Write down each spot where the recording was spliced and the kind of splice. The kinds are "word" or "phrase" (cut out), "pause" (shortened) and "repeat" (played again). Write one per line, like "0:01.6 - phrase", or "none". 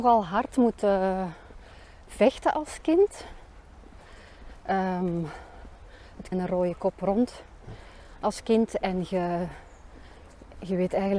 0:06.3 - phrase